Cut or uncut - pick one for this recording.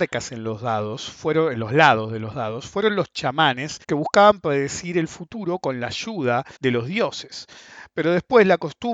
cut